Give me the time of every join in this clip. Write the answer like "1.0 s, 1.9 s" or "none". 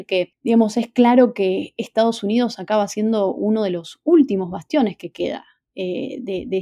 none

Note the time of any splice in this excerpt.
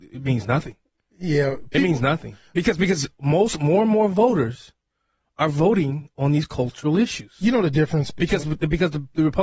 none

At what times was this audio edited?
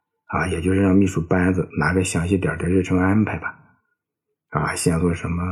none

